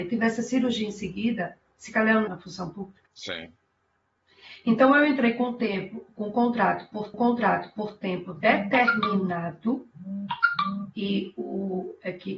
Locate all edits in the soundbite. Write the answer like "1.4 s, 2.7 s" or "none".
2.3 s, 3.1 s, 7.1 s